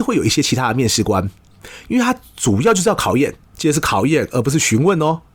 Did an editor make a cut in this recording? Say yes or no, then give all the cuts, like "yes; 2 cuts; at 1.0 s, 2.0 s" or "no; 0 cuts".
yes; 1 cut; at 3.4 s